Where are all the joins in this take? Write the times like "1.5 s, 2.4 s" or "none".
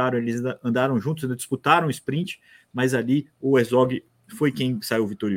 none